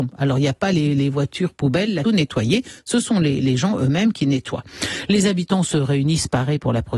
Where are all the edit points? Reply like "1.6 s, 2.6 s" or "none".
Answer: 2.0 s, 3.4 s